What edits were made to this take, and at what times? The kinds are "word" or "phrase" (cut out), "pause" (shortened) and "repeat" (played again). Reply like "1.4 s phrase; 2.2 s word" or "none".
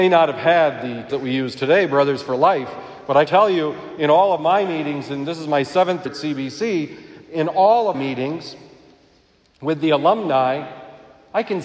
1.1 s word; 3.3 s word; 6.1 s word; 7.9 s word